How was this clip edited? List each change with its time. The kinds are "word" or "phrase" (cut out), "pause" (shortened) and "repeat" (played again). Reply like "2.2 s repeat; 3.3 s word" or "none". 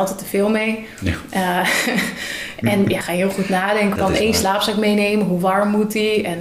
3.0 s word; 4.0 s phrase